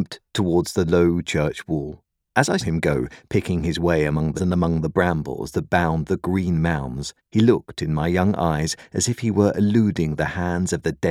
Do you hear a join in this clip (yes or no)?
yes